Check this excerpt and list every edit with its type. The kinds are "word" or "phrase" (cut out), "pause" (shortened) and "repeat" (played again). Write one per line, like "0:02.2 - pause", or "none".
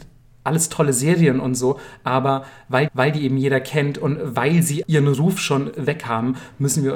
0:02.9 - repeat
0:04.8 - word

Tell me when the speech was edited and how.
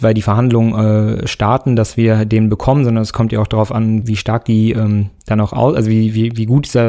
0:04.0 - word

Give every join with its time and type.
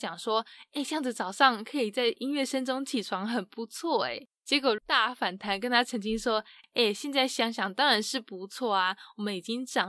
0:04.8 - word

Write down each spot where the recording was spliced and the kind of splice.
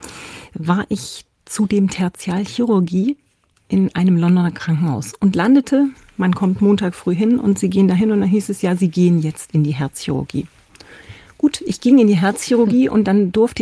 none

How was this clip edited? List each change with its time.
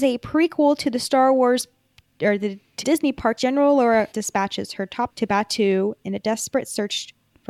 0:02.8 - word
0:03.4 - word
0:04.1 - word
0:05.1 - word

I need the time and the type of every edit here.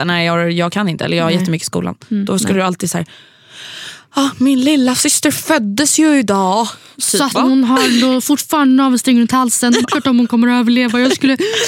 0:07.3 - word
0:09.8 - word

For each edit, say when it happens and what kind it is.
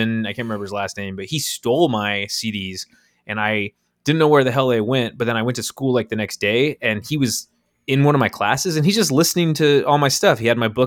none

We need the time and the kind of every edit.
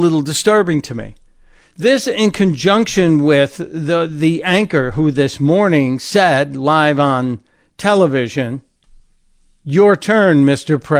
none

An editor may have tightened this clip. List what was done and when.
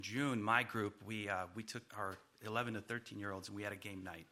0:01.9 - pause

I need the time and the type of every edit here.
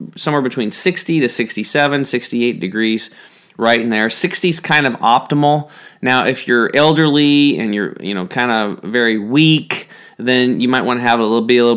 none

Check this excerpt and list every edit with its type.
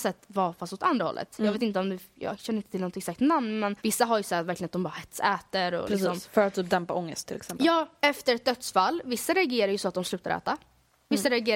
0:03.8 - pause

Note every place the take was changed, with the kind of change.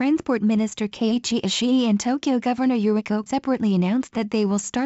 0:03.3 - word

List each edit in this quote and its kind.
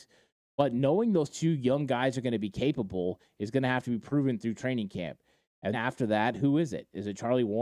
0:05.7 - word

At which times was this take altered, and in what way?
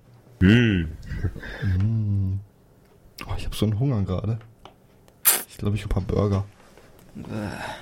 0:02.5 - pause
0:05.8 - phrase

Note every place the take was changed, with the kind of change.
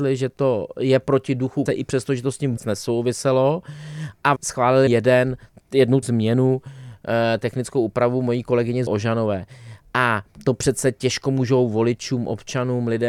0:01.7 - word
0:02.6 - word
0:04.4 - word
0:04.9 - word
0:06.0 - word
0:08.9 - word

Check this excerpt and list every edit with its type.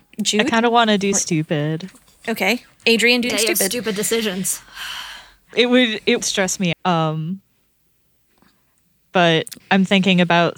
0:01.1 - word
0:03.3 - word
0:05.5 - word
0:06.2 - word
0:06.7 - word
0:09.6 - word

